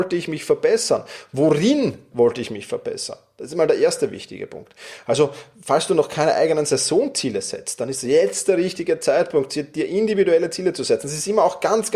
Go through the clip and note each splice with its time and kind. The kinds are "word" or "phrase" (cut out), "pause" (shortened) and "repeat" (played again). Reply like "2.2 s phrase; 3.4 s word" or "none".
none